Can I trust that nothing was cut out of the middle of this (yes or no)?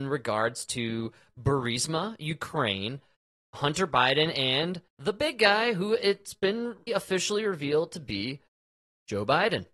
no